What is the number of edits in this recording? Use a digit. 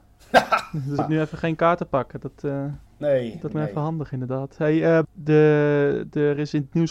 4